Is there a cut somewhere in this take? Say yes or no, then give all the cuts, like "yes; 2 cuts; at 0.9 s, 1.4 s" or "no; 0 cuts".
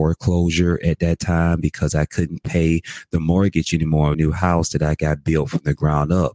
yes; 1 cut; at 4.1 s